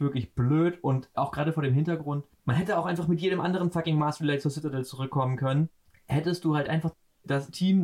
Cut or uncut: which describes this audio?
uncut